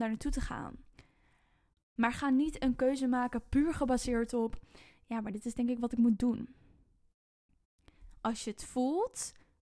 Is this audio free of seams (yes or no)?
yes